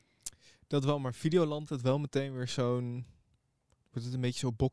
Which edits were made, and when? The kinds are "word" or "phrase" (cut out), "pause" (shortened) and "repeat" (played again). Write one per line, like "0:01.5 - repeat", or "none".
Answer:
0:01.7 - phrase